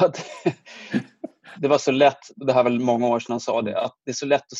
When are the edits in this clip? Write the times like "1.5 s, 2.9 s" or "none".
1.5 s